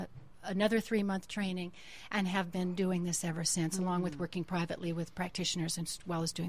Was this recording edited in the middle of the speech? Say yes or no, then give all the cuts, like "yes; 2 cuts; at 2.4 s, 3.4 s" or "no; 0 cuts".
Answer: no; 0 cuts